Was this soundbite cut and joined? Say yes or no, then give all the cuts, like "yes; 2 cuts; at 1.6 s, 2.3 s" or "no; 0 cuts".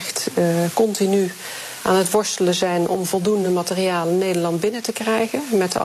no; 0 cuts